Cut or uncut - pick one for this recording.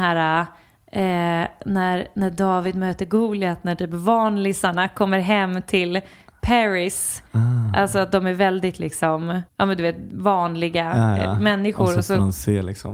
cut